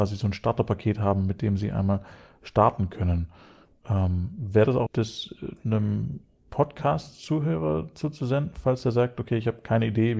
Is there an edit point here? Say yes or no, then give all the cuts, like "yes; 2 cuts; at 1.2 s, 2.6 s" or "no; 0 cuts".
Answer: yes; 1 cut; at 4.9 s